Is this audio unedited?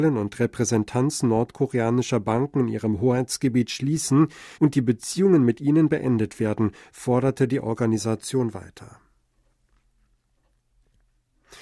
no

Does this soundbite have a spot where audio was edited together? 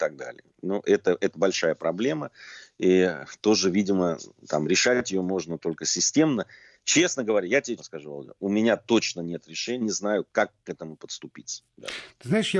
yes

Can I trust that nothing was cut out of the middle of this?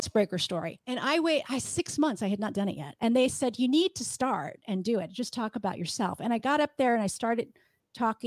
yes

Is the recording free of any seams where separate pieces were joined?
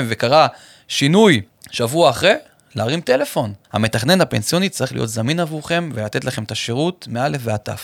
no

